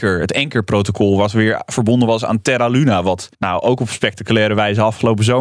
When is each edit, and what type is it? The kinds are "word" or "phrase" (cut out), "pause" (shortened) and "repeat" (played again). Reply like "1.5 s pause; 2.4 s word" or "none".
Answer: 3.3 s pause